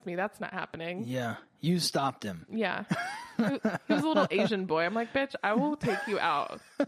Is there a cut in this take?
no; 0 cuts

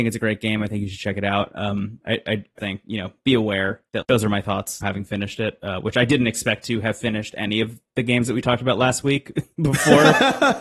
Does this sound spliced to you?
yes; 3 cuts; at 2.6 s, 4.0 s, 4.8 s

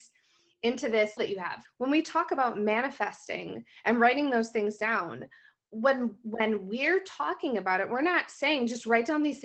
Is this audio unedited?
no; 2 cuts; at 1.2 s, 1.6 s

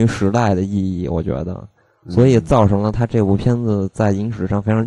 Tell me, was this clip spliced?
no; 0 cuts

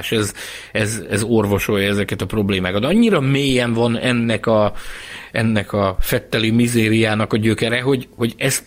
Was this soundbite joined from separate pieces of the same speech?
no; 0 cuts

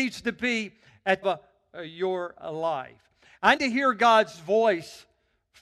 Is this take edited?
yes; 2 cuts; at 1.2 s, 3.6 s

